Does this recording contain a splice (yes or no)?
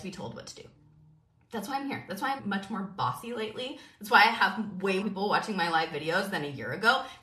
yes